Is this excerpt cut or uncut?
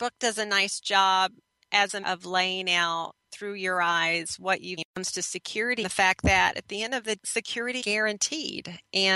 cut